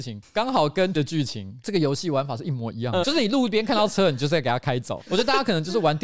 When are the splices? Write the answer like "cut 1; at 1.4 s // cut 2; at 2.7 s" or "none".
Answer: cut 1; at 1.0 s // cut 2; at 3.0 s